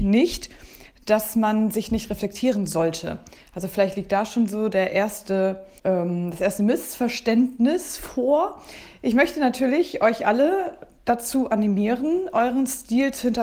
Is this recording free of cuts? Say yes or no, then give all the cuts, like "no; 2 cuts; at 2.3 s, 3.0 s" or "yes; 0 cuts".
no; 1 cut; at 5.8 s